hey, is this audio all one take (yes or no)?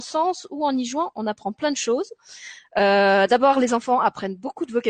yes